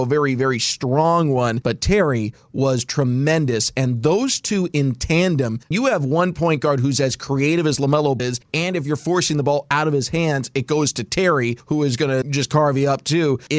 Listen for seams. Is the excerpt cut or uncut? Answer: cut